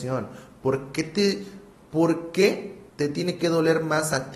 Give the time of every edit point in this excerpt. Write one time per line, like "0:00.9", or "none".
0:01.7
0:02.9